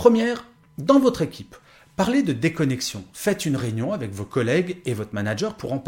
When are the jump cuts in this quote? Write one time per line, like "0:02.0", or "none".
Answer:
none